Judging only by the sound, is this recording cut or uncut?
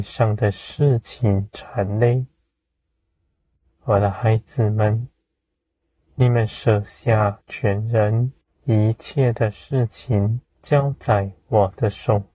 cut